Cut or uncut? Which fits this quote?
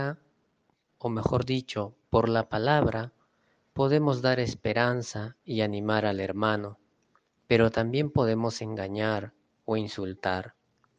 uncut